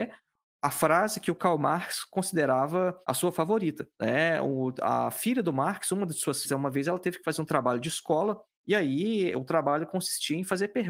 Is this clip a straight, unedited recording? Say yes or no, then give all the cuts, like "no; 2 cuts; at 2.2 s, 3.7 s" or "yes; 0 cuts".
no; 4 cuts; at 3.0 s, 3.9 s, 6.4 s, 8.5 s